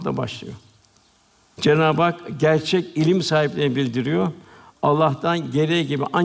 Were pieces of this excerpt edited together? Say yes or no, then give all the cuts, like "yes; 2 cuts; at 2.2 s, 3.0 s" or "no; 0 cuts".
no; 0 cuts